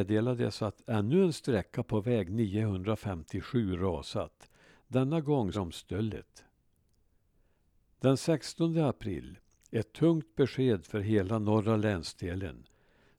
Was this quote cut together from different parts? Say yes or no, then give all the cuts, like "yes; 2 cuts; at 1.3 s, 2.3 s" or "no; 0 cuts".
yes; 1 cut; at 5.5 s